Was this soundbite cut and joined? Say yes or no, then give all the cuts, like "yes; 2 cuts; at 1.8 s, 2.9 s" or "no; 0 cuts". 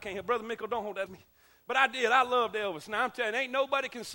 yes; 1 cut; at 1.1 s